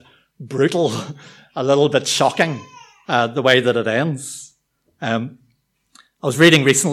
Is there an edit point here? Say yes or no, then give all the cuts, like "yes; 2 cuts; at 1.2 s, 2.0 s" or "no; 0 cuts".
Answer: no; 0 cuts